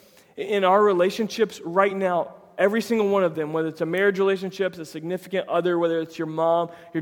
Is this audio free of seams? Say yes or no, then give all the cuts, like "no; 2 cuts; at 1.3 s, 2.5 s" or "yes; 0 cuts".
yes; 0 cuts